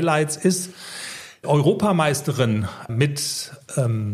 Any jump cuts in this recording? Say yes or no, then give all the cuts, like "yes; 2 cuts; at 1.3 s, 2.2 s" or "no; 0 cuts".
yes; 2 cuts; at 1.4 s, 2.9 s